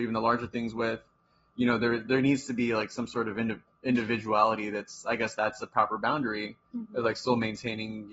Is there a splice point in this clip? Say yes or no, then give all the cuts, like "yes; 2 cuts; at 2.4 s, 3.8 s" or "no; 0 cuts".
no; 0 cuts